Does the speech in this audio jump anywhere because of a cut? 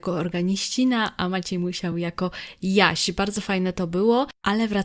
no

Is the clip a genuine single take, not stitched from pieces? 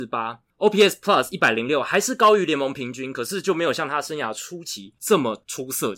yes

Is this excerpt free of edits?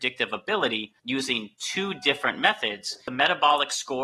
no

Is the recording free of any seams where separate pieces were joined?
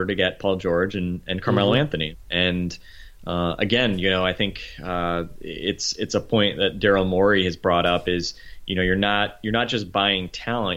yes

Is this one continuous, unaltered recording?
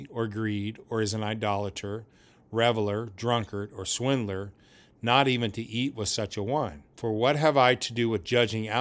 no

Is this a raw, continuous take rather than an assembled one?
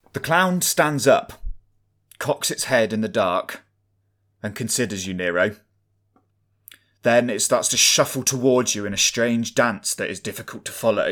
yes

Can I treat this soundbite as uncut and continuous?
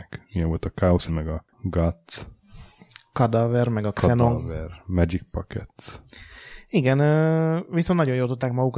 no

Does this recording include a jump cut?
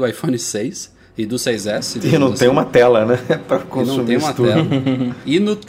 no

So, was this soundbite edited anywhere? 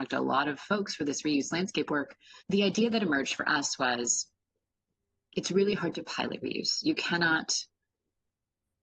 yes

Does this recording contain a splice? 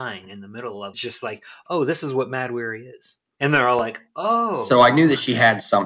yes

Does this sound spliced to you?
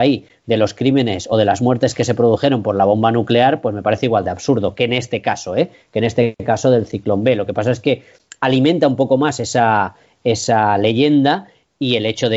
no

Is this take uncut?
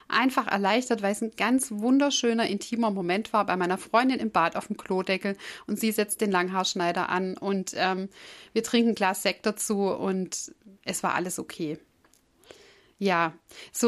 yes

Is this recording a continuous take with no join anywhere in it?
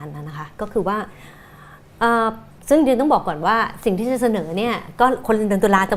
no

